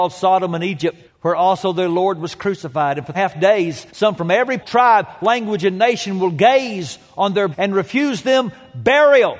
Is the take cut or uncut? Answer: cut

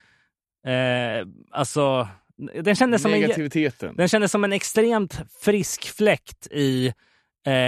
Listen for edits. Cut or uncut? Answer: uncut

